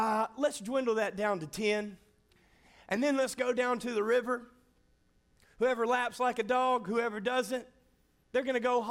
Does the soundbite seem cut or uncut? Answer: uncut